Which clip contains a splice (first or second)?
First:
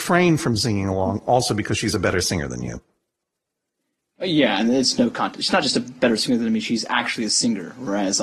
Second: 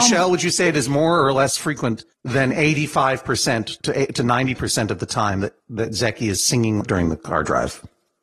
second